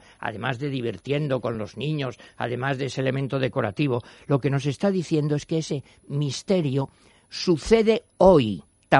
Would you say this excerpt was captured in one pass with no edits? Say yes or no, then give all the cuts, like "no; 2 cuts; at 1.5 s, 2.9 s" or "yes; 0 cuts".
yes; 0 cuts